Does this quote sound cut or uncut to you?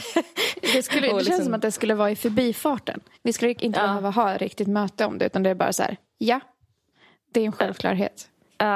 uncut